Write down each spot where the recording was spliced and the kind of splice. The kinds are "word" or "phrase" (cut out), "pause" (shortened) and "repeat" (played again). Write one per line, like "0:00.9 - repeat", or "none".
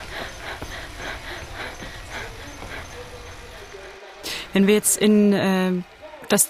none